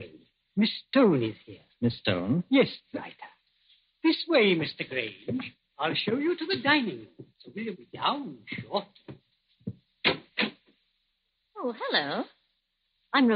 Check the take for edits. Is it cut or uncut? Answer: cut